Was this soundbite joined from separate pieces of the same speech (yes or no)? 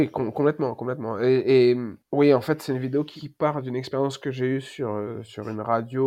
yes